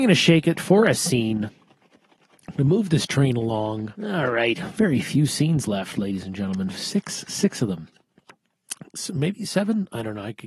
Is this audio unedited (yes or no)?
no